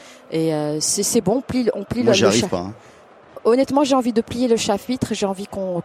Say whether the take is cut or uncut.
uncut